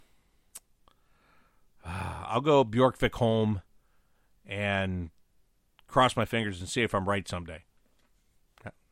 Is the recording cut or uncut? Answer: uncut